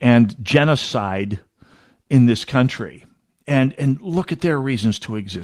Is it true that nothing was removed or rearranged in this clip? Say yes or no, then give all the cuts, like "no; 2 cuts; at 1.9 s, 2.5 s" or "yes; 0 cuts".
yes; 0 cuts